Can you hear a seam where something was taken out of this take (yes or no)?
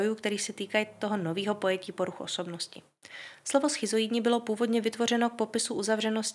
no